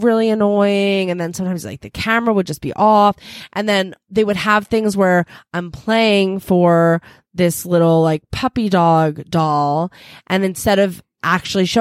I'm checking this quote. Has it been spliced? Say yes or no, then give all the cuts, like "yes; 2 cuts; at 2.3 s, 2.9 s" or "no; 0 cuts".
no; 0 cuts